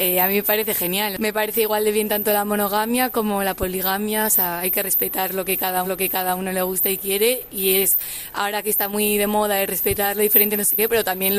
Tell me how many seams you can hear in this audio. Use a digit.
1